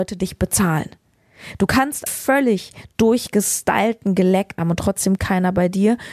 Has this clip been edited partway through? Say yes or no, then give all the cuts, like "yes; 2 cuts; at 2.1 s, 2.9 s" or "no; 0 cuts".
yes; 3 cuts; at 2.1 s, 4.6 s, 5.2 s